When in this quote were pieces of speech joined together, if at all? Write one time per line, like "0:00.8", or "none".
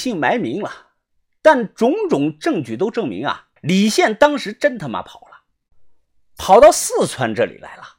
0:03.6

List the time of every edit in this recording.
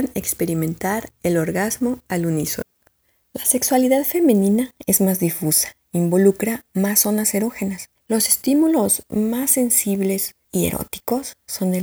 0:03.0
0:07.9
0:10.4

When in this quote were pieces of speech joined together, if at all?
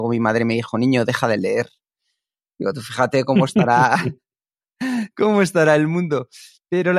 none

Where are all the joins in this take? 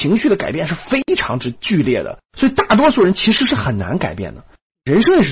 0:02.3

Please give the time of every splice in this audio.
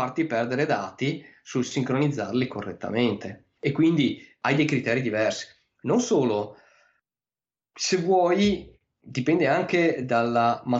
none

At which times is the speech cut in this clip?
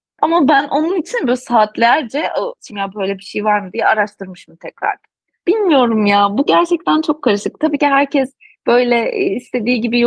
0:02.7
0:06.5
0:07.8

